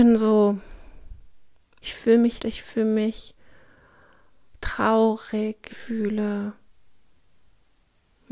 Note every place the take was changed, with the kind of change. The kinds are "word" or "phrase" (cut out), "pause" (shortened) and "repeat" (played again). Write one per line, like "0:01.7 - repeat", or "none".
0:01.8 - word
0:02.4 - word
0:05.7 - word